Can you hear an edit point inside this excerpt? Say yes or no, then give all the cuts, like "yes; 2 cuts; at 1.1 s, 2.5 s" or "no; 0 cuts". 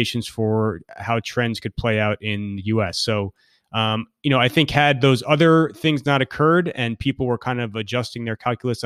no; 0 cuts